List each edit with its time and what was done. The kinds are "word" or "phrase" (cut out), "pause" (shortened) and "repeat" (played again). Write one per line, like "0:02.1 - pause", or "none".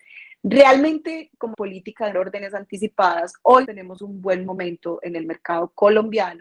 0:01.5 - phrase
0:02.1 - word
0:03.6 - word